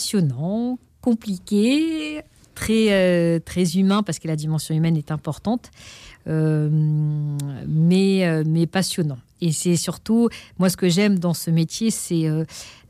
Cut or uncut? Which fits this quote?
uncut